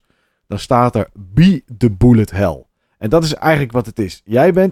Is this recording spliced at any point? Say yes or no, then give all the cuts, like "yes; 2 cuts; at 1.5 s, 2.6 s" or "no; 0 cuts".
no; 0 cuts